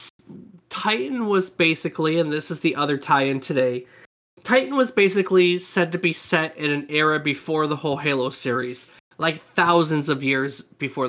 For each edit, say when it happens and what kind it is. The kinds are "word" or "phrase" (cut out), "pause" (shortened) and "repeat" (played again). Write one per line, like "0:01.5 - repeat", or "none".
none